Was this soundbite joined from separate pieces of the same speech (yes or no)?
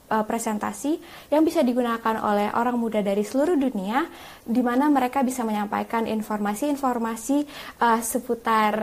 no